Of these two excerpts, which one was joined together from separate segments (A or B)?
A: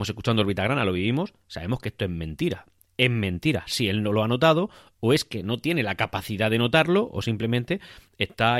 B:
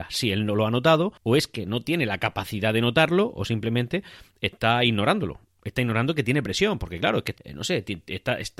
B